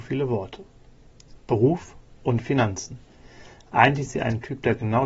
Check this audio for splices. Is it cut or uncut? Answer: cut